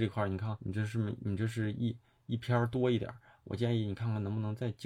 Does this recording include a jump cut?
no; 0 cuts

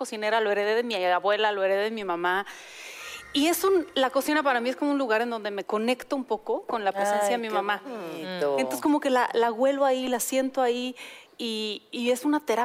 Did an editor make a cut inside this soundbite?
no; 0 cuts

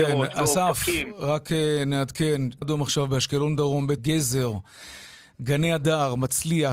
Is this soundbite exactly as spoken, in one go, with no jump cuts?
no; 2 cuts; at 2.6 s, 4.0 s

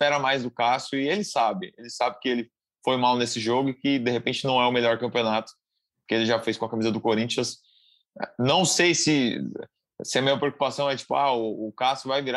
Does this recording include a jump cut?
no; 0 cuts

